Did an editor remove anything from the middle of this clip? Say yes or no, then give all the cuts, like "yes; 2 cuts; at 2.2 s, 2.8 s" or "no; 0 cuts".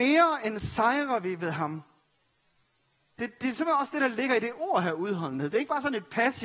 no; 0 cuts